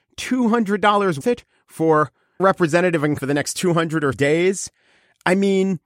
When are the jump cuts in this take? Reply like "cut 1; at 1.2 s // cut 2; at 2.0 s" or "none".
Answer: cut 1; at 1.2 s // cut 2; at 2.4 s // cut 3; at 3.2 s // cut 4; at 4.1 s